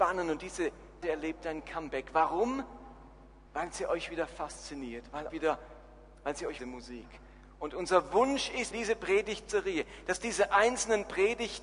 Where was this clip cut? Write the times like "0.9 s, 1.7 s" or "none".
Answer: 1.0 s, 3.5 s, 5.3 s, 6.6 s, 8.7 s